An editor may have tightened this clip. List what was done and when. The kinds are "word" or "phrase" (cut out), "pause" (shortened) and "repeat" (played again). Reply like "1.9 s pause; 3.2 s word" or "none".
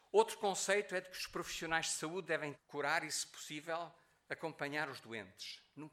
2.5 s word